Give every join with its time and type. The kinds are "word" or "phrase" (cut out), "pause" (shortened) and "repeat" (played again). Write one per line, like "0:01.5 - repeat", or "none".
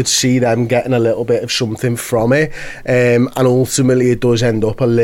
none